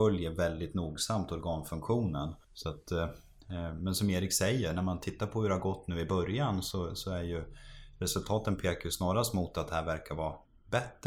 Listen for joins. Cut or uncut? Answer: cut